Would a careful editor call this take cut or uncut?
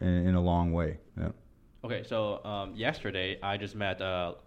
cut